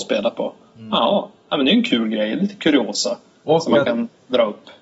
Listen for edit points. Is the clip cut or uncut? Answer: uncut